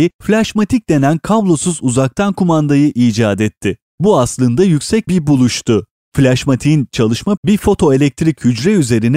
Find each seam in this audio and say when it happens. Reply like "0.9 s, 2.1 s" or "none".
5.1 s, 7.4 s